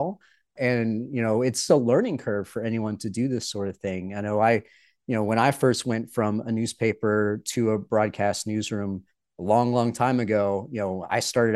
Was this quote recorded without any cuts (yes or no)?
yes